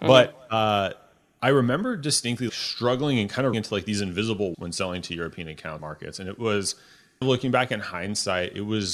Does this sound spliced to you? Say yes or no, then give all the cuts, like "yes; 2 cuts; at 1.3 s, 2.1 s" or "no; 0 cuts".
yes; 5 cuts; at 2.5 s, 3.5 s, 4.5 s, 5.8 s, 7.2 s